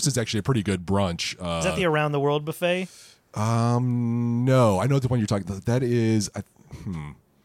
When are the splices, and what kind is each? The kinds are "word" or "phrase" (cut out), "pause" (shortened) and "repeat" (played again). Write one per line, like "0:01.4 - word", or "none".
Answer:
none